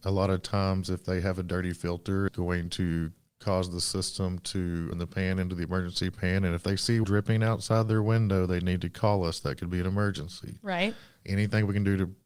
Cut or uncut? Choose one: cut